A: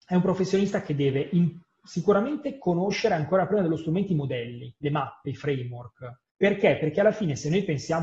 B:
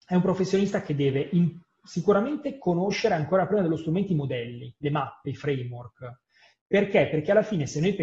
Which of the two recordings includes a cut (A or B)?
A